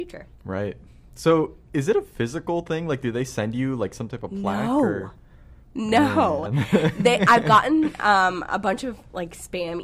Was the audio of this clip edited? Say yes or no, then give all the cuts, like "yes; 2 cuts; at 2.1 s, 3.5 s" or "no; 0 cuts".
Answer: no; 0 cuts